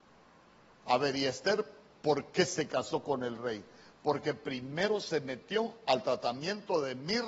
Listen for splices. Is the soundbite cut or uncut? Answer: uncut